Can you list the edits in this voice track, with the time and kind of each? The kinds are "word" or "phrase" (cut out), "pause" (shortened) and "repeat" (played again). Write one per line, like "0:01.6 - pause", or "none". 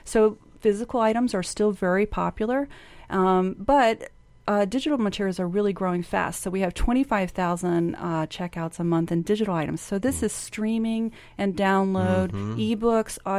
none